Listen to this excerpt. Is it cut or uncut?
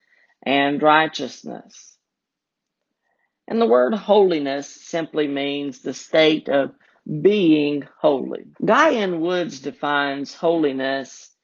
cut